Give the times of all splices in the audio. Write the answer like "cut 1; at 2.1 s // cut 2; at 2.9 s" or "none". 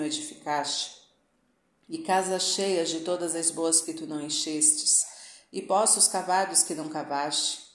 cut 1; at 3.8 s